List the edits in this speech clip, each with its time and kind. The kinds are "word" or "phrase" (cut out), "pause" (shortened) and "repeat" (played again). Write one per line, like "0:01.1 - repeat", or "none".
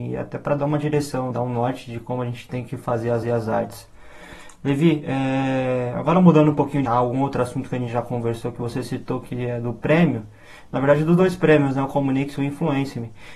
0:01.3 - word
0:03.2 - repeat
0:06.9 - phrase

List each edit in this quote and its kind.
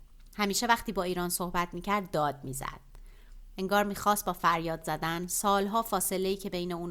none

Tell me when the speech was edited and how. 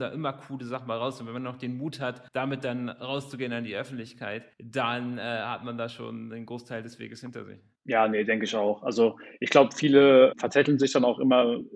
0:02.3 - pause
0:04.5 - pause

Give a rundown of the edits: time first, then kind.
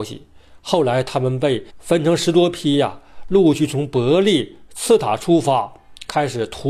0:01.7 - pause

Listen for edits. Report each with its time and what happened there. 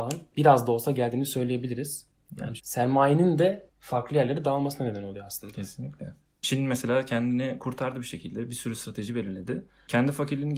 0:02.6 - phrase
0:03.7 - pause

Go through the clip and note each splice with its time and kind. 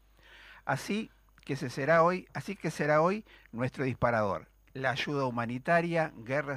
none

